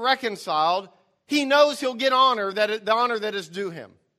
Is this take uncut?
yes; 0 cuts

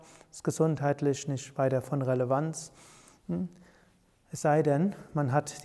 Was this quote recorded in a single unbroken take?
yes; 0 cuts

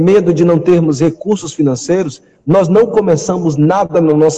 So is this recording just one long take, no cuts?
yes; 0 cuts

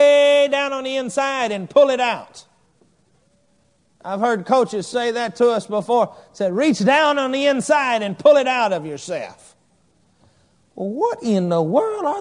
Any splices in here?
no; 0 cuts

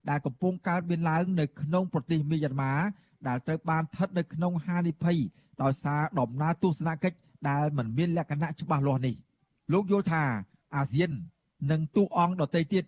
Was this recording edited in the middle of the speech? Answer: no; 0 cuts

